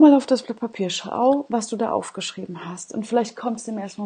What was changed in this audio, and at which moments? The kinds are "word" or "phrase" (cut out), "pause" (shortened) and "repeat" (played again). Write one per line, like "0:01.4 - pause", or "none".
none